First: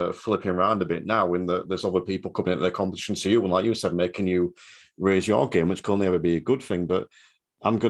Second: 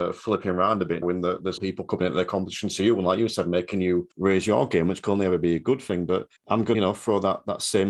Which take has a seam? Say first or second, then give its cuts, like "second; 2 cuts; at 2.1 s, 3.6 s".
second; 5 cuts; at 1.0 s, 1.6 s, 4.1 s, 6.4 s, 6.7 s